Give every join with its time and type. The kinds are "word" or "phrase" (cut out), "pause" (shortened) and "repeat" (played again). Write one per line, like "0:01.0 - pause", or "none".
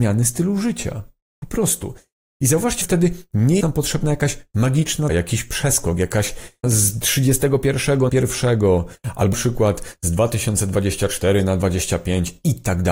0:02.8 - word
0:03.6 - word
0:05.1 - word
0:06.6 - word
0:08.1 - word
0:09.3 - word